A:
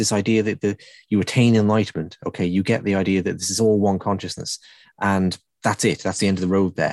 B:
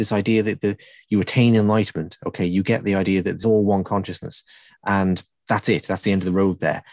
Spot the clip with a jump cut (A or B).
B